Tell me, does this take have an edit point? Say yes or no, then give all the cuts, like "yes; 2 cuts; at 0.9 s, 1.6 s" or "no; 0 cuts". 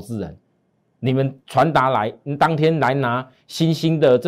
yes; 1 cut; at 1.4 s